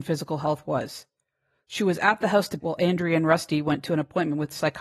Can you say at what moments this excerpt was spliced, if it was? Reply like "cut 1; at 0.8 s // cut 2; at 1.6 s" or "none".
cut 1; at 2.6 s